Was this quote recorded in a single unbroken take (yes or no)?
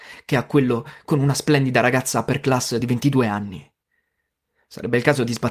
yes